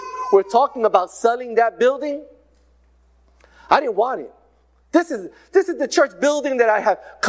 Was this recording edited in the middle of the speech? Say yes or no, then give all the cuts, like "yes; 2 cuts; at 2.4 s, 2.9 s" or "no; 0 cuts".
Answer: no; 0 cuts